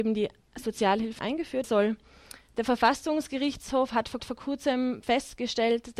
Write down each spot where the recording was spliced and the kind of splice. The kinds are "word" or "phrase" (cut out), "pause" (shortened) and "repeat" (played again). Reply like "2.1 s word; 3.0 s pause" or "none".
1.2 s word; 1.6 s word; 4.2 s repeat

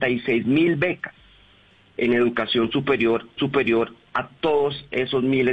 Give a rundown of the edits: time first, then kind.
3.4 s repeat

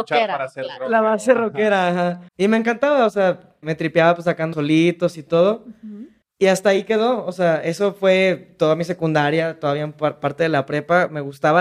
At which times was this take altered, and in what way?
2.3 s pause; 3.6 s word; 4.5 s word; 6.2 s pause

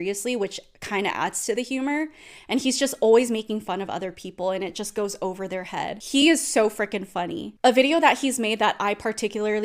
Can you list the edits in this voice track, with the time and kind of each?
none

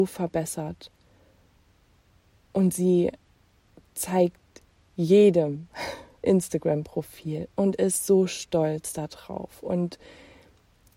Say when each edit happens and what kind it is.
6.2 s phrase

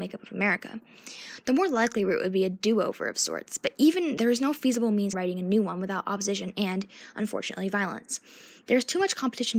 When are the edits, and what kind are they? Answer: 4.2 s word; 5.1 s phrase

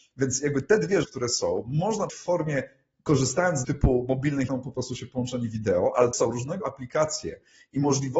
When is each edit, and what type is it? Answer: 1.0 s word; 2.1 s word; 3.6 s word; 4.5 s word; 6.1 s word; 6.6 s word

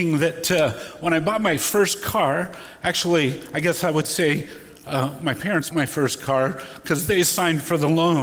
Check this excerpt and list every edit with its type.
5.7 s word

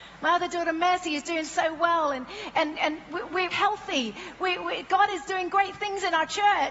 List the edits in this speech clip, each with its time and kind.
3.5 s word

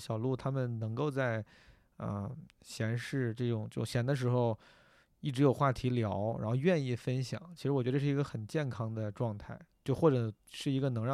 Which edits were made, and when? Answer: none

